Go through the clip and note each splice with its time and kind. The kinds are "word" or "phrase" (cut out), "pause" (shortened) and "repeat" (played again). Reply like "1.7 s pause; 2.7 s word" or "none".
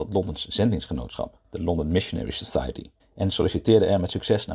3.0 s pause